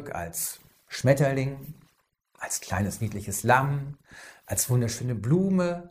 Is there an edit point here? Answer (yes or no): no